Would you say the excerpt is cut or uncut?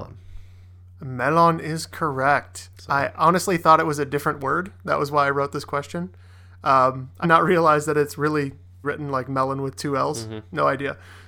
cut